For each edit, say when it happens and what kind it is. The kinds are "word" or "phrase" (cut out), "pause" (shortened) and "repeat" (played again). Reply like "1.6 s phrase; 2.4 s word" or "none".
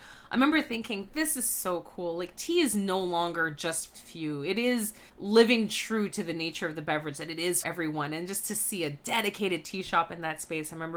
3.9 s phrase; 5.1 s pause; 7.6 s word